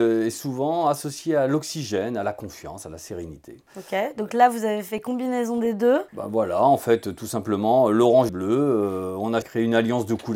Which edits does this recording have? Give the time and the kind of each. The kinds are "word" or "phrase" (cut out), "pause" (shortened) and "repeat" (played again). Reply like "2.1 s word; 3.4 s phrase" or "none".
3.7 s pause; 6.1 s pause; 8.3 s phrase; 9.4 s phrase